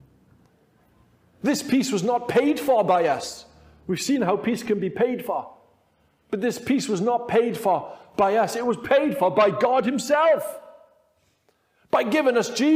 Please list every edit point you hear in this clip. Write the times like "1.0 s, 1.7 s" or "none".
none